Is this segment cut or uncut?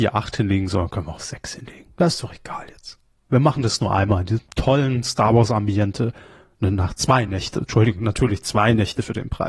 uncut